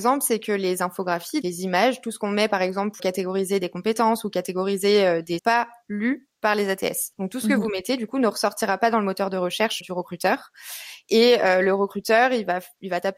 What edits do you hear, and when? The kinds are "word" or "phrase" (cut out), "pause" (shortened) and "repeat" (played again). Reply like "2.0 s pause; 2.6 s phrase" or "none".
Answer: 1.4 s word; 3.0 s word; 5.4 s phrase; 7.1 s pause; 9.8 s word